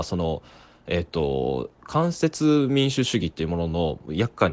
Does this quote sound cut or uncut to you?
uncut